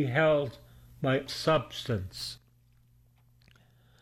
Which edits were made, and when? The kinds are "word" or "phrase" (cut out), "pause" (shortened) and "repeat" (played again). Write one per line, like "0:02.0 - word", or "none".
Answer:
0:01.3 - word